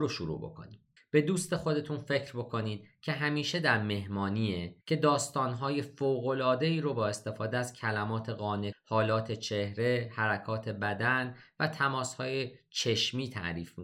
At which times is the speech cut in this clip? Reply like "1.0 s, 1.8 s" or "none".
1.0 s, 4.8 s, 8.7 s

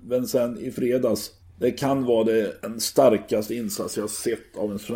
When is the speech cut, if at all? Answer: 1.4 s, 2.6 s

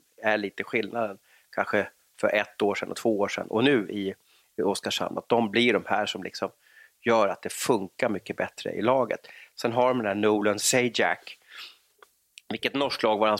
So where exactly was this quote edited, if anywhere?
none

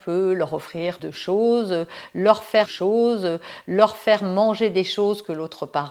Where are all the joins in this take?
1.0 s, 2.7 s

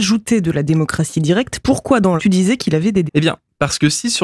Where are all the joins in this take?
2.2 s, 3.1 s

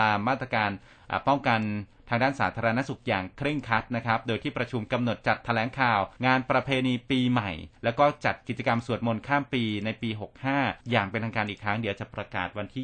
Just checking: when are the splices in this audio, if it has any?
6.2 s, 7.8 s, 10.8 s

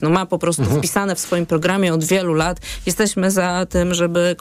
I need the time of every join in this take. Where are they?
none

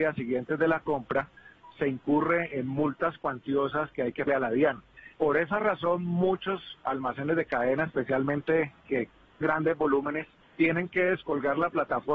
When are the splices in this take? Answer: 4.3 s, 5.1 s, 9.4 s, 10.4 s

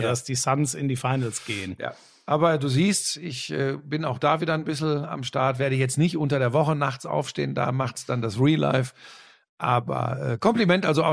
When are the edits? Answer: none

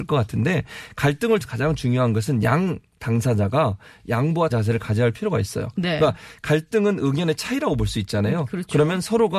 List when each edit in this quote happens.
1.4 s, 4.5 s

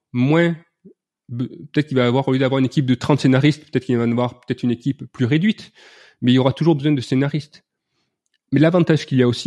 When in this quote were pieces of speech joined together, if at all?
none

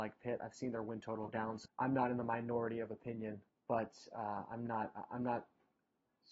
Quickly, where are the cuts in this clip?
1.3 s, 1.7 s, 3.5 s

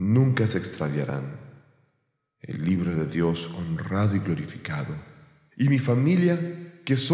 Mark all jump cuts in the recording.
none

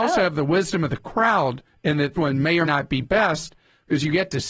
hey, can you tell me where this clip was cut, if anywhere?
1.7 s, 2.2 s, 2.7 s

